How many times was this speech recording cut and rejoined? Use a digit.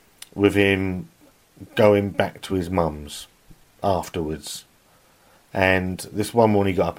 0